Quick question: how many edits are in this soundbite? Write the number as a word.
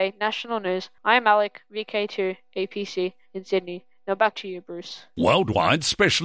two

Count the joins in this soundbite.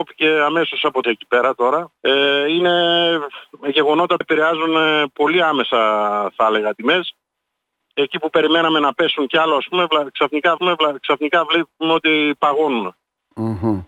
six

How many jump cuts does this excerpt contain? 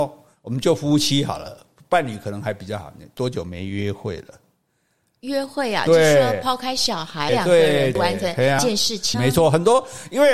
two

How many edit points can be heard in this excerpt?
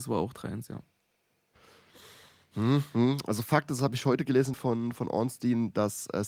one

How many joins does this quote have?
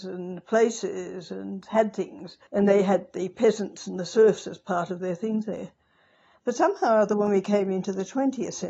one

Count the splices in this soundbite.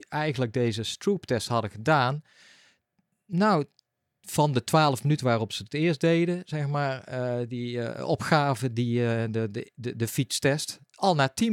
zero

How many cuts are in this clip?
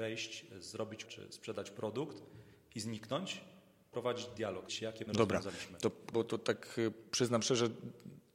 five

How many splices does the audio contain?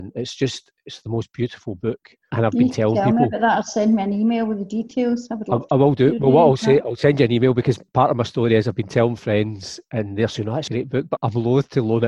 two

